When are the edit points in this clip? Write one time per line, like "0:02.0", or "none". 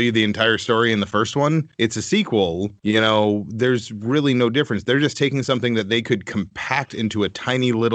0:01.7
0:02.8